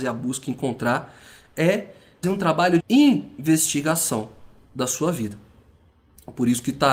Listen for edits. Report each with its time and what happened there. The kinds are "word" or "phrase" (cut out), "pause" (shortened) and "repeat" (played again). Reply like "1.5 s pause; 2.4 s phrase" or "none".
2.2 s word; 2.8 s word